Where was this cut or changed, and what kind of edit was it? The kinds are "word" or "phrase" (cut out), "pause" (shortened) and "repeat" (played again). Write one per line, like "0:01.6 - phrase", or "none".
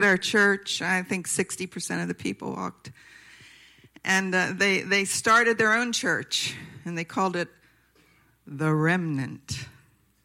none